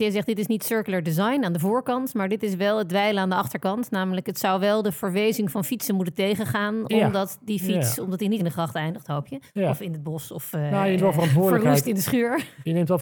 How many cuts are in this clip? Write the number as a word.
three